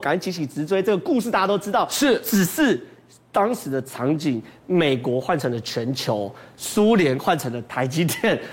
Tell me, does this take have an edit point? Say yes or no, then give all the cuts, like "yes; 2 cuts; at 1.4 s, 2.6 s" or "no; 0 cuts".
no; 0 cuts